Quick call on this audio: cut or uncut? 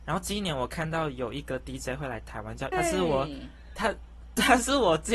cut